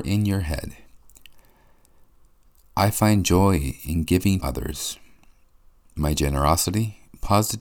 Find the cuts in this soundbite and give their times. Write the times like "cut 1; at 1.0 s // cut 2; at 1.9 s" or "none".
cut 1; at 4.4 s